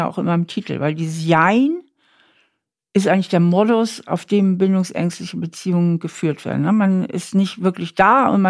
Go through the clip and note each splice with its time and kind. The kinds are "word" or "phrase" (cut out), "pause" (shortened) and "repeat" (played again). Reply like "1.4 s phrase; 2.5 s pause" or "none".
none